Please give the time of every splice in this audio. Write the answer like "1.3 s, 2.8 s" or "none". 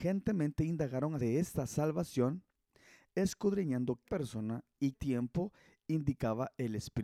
1.2 s, 4.0 s, 4.9 s